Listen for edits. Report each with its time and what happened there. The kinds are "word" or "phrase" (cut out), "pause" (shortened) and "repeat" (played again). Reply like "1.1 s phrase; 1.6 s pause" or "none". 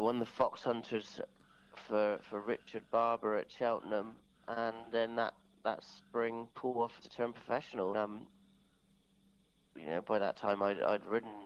6.5 s pause; 7.0 s phrase; 7.9 s word